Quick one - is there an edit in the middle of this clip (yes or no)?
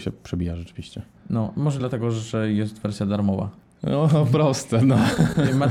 no